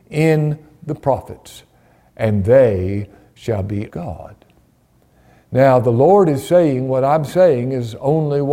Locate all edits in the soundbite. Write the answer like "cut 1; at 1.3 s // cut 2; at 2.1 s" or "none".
cut 1; at 3.9 s